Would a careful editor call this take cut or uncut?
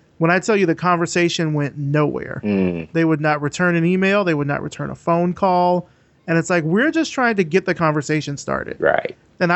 uncut